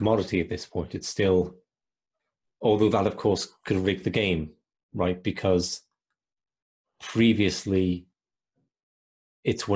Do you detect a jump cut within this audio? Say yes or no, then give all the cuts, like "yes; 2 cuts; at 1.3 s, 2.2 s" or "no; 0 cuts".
no; 0 cuts